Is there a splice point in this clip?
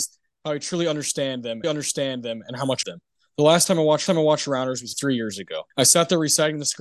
yes; 5 cuts; at 1.6 s, 2.8 s, 4.1 s, 4.9 s, 5.7 s

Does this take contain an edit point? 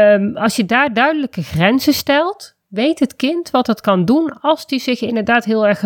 no; 0 cuts

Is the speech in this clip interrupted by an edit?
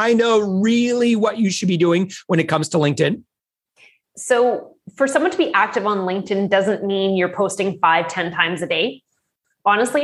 no; 0 cuts

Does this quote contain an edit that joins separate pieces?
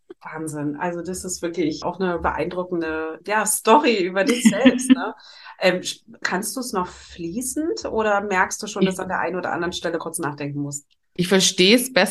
yes; 4 cuts; at 1.8 s, 3.2 s, 6.2 s, 10.0 s

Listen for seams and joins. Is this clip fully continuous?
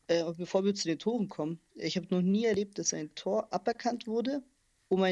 yes; 0 cuts

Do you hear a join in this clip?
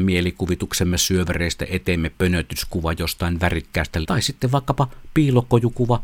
yes; 2 cuts; at 2.2 s, 4.0 s

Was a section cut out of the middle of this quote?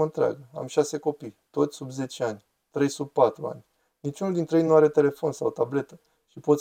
no; 0 cuts

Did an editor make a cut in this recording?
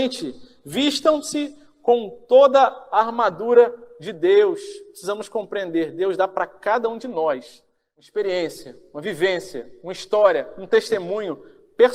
no; 0 cuts

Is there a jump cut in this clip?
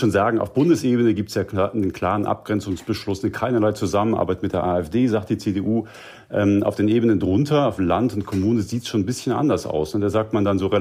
no; 0 cuts

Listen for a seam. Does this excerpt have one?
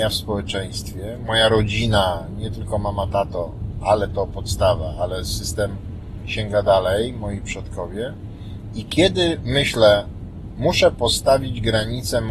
no; 0 cuts

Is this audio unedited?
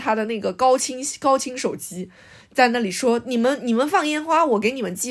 yes; 0 cuts

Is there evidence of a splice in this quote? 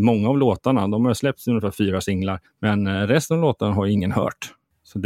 no; 0 cuts

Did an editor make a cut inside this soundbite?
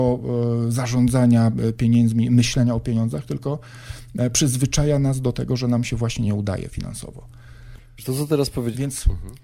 no; 0 cuts

